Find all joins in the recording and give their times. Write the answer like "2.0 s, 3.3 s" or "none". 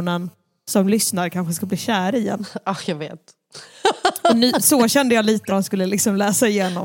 5.5 s